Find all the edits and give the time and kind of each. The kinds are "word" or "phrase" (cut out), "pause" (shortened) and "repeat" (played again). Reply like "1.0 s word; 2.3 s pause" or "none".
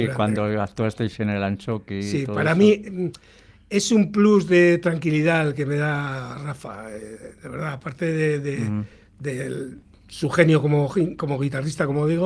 none